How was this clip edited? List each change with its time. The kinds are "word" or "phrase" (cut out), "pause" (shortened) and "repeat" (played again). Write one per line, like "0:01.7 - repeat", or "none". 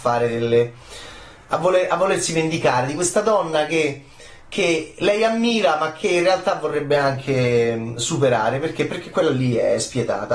none